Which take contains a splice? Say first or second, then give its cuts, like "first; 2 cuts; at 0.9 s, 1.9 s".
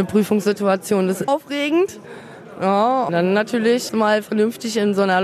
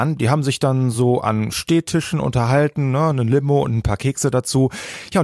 first; 3 cuts; at 1.3 s, 3.1 s, 3.9 s